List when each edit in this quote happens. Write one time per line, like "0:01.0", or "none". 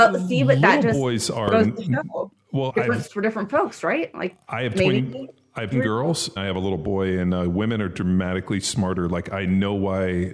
0:02.7
0:03.1
0:04.4
0:05.7
0:06.4

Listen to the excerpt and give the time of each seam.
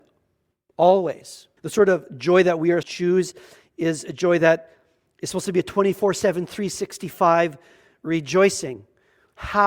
0:01.6
0:02.8

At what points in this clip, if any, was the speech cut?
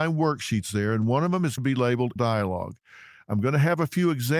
0:01.6
0:02.2

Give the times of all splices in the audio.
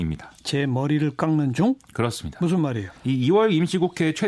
0:03.0

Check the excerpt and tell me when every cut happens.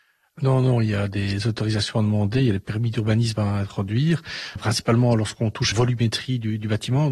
0:04.6
0:05.7

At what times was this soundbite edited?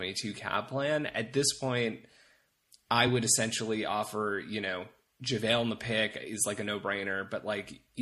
none

